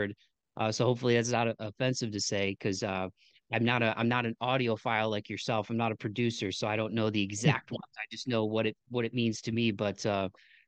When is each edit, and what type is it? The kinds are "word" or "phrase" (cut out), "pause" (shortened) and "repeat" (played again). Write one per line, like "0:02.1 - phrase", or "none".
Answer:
none